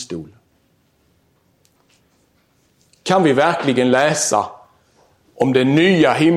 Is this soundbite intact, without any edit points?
yes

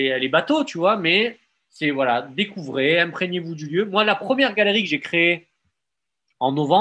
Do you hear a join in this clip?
no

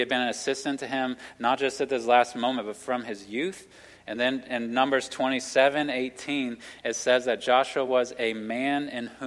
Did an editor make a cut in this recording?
no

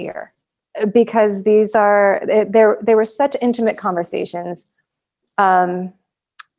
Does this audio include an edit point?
no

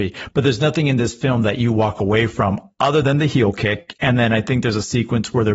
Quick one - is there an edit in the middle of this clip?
no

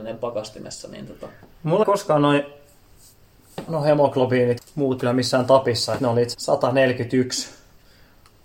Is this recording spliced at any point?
yes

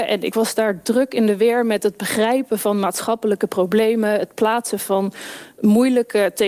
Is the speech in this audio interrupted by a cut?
no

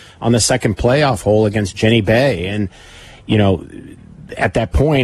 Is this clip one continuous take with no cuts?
yes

